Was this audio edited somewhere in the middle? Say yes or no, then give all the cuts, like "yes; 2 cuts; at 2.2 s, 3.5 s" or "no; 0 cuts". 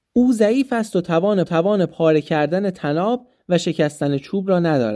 yes; 1 cut; at 1.5 s